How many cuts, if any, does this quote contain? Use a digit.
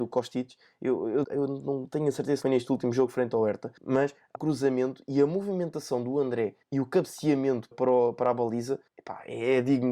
7